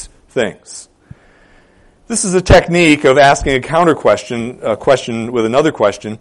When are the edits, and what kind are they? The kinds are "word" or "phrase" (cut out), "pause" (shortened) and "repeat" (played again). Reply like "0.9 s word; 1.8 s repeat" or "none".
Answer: none